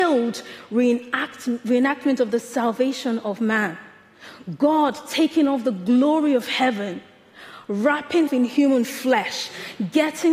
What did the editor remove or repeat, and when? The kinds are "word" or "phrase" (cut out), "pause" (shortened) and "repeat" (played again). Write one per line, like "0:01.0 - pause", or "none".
0:08.3 - word